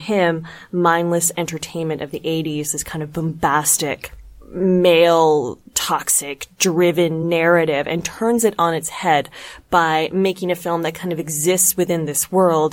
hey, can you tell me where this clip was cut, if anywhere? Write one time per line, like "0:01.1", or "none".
none